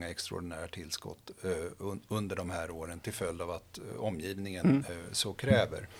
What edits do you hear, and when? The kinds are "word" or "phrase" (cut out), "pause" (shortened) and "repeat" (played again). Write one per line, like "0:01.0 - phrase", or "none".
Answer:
none